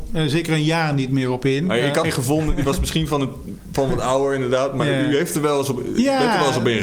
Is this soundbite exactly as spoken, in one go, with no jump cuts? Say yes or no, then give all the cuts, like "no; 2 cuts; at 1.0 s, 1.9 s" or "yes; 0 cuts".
no; 1 cut; at 2.0 s